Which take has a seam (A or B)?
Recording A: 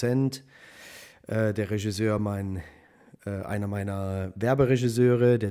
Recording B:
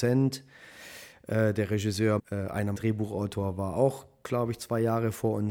B